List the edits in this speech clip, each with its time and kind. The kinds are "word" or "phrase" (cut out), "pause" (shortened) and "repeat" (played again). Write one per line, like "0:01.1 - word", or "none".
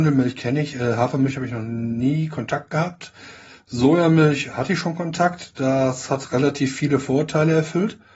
none